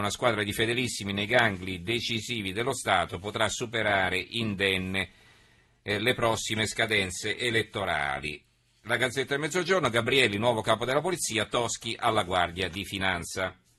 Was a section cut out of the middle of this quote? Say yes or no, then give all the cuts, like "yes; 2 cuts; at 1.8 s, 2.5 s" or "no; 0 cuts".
no; 0 cuts